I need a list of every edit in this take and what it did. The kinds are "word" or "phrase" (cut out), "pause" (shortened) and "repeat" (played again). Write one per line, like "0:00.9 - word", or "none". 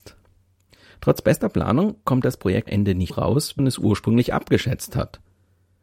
0:02.7 - word
0:03.1 - word
0:03.6 - word